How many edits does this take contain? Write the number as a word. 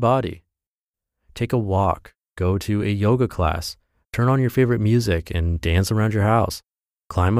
zero